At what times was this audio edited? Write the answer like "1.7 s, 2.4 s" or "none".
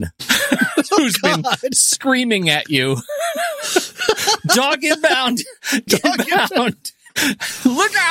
5.9 s